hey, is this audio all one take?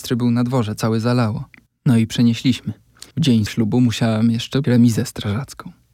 no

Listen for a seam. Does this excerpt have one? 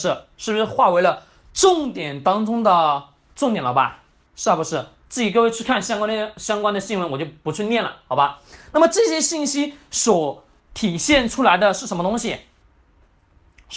no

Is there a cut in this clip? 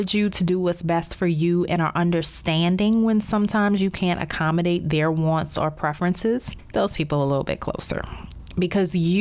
yes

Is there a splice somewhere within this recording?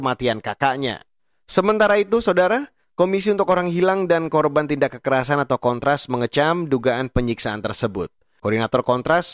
no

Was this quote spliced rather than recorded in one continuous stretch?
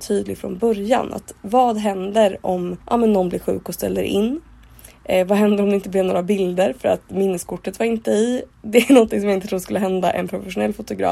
yes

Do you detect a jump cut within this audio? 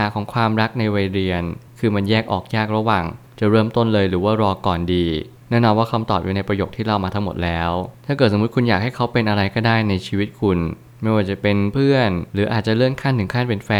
yes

